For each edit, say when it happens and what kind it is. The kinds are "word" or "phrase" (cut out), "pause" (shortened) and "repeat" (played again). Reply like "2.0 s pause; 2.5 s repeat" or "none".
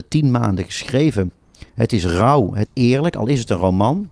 1.7 s pause; 2.7 s word

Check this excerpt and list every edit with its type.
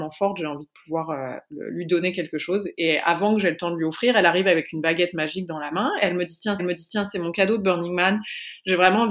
6.6 s repeat

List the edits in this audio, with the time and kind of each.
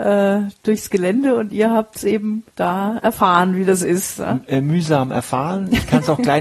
2.5 s pause

